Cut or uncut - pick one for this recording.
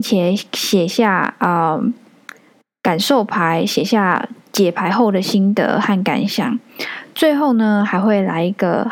uncut